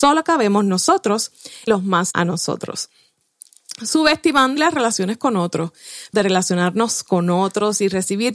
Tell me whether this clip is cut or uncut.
cut